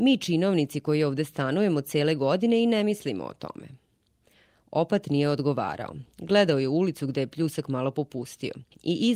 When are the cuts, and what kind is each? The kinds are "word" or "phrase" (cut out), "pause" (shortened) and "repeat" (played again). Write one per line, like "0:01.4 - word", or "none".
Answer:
none